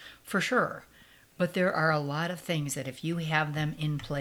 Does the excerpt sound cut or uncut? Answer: uncut